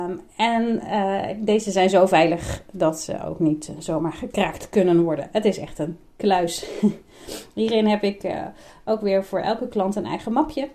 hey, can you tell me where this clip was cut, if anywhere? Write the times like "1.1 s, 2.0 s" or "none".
none

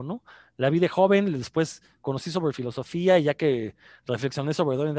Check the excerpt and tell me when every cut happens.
none

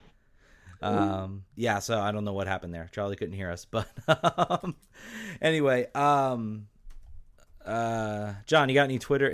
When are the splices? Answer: 1.5 s

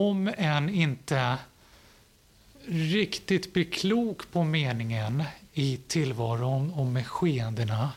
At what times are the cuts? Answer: none

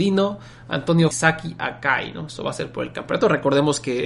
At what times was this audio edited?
1.1 s

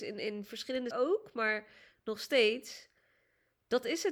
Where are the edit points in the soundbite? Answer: 0.9 s

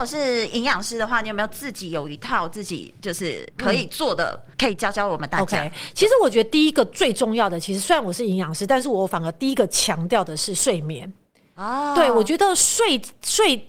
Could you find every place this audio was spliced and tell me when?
4.5 s

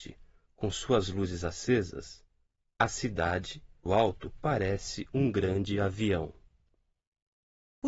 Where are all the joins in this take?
3.9 s

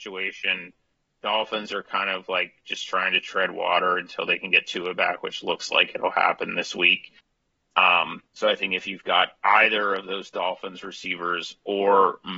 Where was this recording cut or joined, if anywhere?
8.3 s

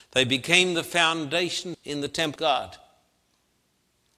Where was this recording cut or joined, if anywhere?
1.7 s, 2.4 s

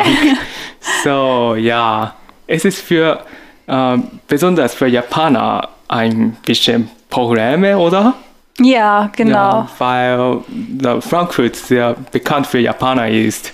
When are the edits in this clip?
none

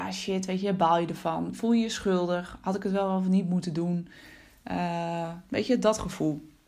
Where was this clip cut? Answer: none

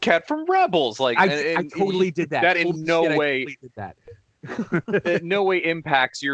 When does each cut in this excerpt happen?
none

